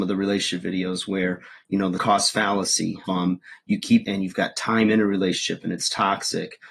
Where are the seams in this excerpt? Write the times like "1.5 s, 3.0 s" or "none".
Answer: 2.0 s, 3.1 s, 4.0 s